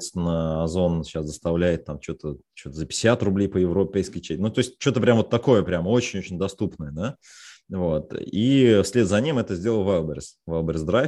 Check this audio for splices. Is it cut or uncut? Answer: uncut